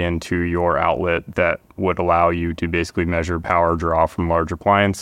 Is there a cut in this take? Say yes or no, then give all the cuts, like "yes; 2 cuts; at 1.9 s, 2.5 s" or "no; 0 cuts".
no; 0 cuts